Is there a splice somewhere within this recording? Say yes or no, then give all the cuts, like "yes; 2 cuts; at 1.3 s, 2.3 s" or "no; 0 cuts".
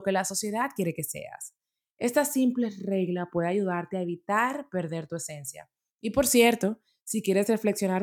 no; 0 cuts